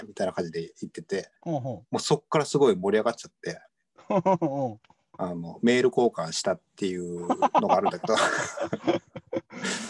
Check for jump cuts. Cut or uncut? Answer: cut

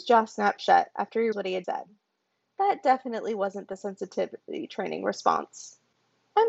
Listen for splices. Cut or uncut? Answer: cut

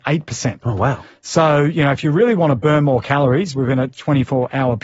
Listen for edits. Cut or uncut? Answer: uncut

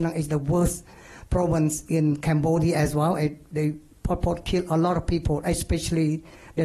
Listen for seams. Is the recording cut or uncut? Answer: uncut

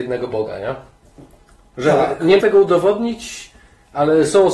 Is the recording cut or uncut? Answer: cut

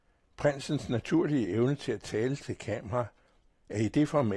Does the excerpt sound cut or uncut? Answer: uncut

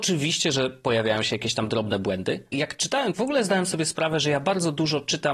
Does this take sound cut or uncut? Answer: cut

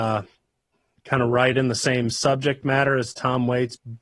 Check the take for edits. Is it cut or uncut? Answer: uncut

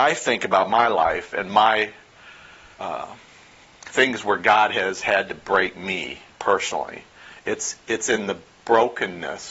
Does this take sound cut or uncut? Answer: uncut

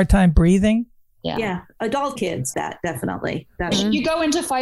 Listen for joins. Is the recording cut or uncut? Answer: cut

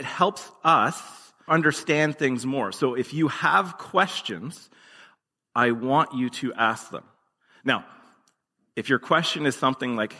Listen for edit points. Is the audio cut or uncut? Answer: cut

